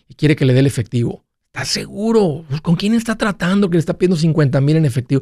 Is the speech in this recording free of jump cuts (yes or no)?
yes